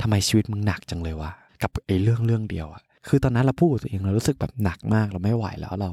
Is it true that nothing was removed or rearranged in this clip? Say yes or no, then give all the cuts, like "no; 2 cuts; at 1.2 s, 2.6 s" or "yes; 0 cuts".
no; 1 cut; at 1.5 s